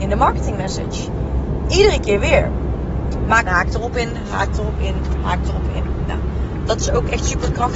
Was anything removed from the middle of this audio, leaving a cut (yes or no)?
yes